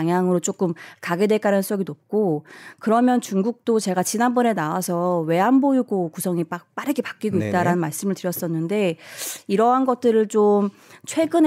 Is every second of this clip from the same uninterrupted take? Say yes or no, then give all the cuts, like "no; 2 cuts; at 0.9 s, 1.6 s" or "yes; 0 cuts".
yes; 0 cuts